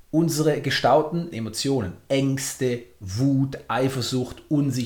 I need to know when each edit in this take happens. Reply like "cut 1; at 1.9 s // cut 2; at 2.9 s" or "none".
cut 1; at 1.3 s